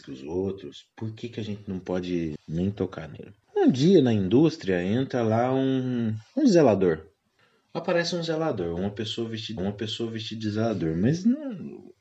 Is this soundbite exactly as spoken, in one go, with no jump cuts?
no; 4 cuts; at 2.4 s, 3.4 s, 7.4 s, 9.6 s

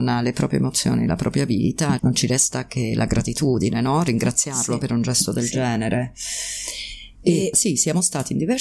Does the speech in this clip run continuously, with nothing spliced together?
no; 2 cuts; at 2.0 s, 7.5 s

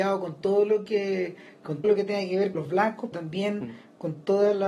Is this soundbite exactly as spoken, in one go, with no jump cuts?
no; 3 cuts; at 1.8 s, 2.5 s, 3.1 s

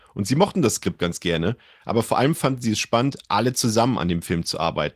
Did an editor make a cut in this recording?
no; 0 cuts

